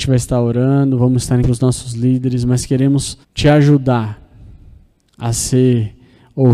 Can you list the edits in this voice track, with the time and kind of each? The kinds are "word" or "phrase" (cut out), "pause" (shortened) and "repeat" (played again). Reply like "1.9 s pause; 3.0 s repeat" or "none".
1.4 s word; 3.2 s pause